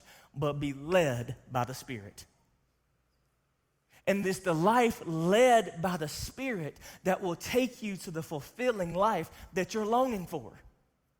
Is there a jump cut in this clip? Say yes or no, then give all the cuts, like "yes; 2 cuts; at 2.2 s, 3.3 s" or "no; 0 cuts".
no; 0 cuts